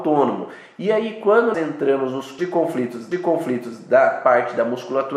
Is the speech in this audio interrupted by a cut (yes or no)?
yes